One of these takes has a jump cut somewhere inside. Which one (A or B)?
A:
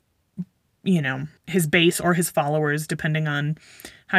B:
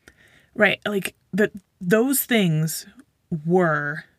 A